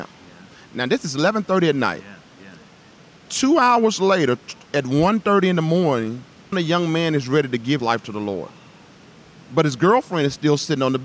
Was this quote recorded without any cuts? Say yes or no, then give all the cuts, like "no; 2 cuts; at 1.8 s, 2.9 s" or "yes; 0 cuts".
no; 2 cuts; at 6.5 s, 7.8 s